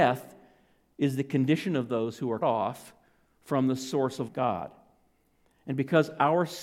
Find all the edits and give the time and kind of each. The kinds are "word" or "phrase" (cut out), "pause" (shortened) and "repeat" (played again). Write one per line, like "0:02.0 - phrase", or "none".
0:02.4 - word
0:04.3 - word